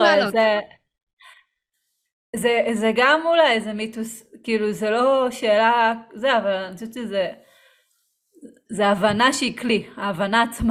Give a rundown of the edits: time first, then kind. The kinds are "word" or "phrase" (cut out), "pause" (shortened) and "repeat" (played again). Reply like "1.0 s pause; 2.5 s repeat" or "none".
none